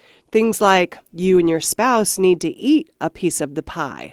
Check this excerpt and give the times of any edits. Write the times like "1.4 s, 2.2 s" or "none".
1.0 s